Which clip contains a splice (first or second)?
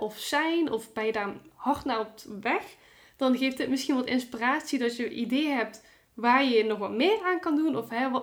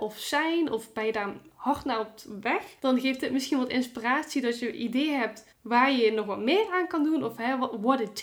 second